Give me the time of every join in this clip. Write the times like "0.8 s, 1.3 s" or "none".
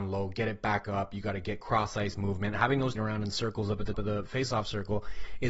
3.0 s, 3.9 s

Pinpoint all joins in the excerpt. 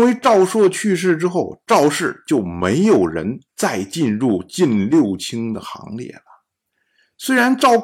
3.5 s

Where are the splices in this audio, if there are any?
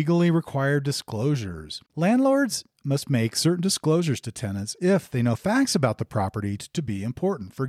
1.9 s, 6.6 s

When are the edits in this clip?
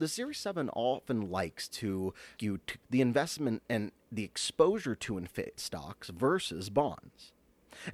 2.4 s, 2.8 s, 5.6 s

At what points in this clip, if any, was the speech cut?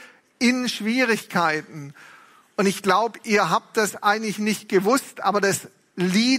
none

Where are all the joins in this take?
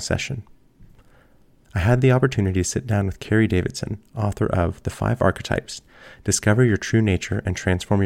none

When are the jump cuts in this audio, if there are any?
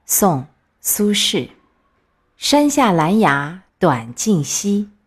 2.1 s, 3.7 s

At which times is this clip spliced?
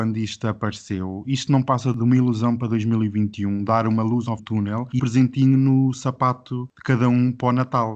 4.4 s, 5.0 s

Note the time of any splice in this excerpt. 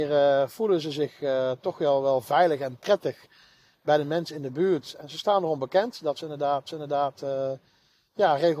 6.7 s

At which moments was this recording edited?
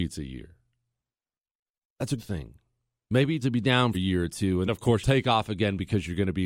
2.2 s, 3.4 s, 3.9 s, 4.7 s, 5.0 s

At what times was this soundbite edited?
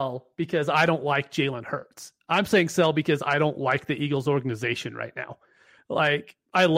none

